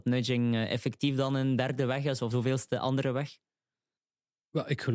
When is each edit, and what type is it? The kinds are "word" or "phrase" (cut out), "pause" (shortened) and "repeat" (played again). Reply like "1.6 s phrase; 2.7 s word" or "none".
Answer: 2.3 s word